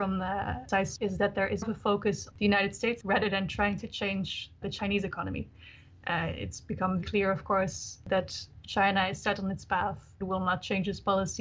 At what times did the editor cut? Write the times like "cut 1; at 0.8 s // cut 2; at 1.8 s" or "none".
cut 1; at 1.0 s // cut 2; at 1.6 s // cut 3; at 2.3 s // cut 4; at 3.0 s // cut 5; at 4.6 s // cut 6; at 7.0 s // cut 7; at 10.2 s